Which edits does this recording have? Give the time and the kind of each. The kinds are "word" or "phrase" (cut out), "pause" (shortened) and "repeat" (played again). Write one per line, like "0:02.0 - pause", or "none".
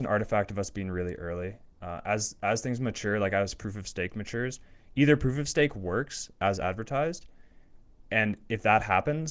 0:01.7 - pause